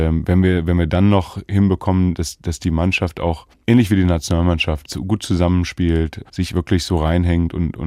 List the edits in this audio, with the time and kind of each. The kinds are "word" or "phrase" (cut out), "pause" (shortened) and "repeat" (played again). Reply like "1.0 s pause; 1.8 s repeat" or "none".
3.5 s pause; 6.3 s pause